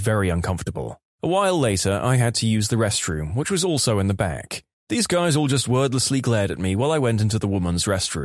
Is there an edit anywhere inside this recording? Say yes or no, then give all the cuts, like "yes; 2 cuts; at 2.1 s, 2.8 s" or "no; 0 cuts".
no; 0 cuts